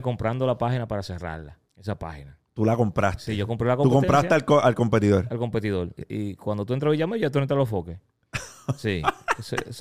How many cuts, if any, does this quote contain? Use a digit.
2